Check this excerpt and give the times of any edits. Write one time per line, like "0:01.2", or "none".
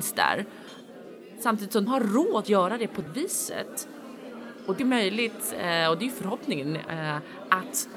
0:01.9
0:02.4
0:03.1
0:04.8